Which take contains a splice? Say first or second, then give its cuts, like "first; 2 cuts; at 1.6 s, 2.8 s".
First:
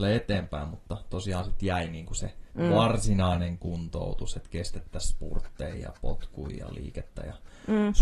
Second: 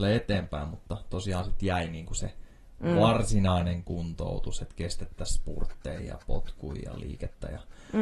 first; 1 cut; at 2.5 s